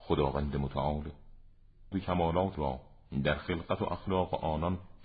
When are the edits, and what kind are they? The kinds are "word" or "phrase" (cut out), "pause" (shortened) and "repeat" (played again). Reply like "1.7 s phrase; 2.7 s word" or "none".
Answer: 1.9 s word; 2.5 s word